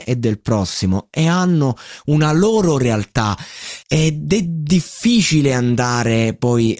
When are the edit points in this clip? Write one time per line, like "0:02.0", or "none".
0:03.8